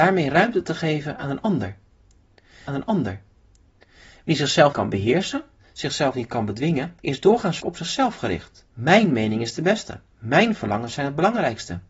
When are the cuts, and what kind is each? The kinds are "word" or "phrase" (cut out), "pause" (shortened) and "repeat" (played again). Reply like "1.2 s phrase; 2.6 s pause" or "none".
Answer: 2.7 s repeat; 4.7 s word; 7.0 s pause; 7.6 s word; 8.7 s pause; 10.1 s pause